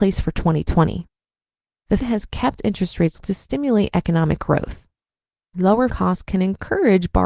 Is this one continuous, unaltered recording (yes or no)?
no